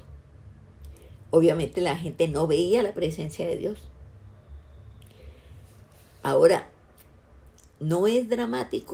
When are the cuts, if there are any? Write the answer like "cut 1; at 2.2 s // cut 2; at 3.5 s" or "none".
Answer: none